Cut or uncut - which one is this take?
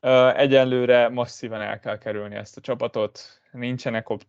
uncut